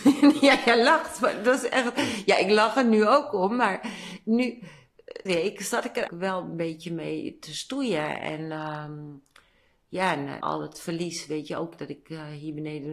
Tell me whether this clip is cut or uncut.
cut